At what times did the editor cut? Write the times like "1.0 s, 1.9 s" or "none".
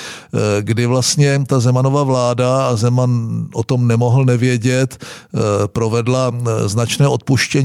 none